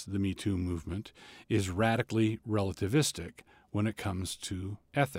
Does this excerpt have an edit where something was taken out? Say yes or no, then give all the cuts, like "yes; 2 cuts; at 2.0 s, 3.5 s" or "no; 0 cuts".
no; 0 cuts